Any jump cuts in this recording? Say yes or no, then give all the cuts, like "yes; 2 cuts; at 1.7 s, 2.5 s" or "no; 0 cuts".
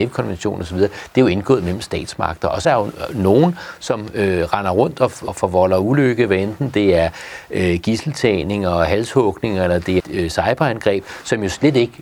yes; 3 cuts; at 2.6 s, 5.3 s, 10.0 s